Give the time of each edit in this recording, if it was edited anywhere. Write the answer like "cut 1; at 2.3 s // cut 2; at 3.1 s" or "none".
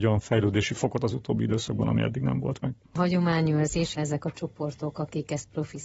cut 1; at 3.9 s